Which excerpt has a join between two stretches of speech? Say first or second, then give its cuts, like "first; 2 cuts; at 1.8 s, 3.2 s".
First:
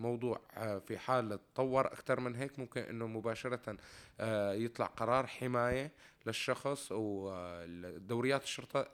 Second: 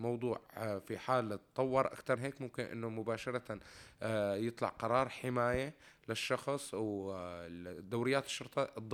second; 1 cut; at 2.2 s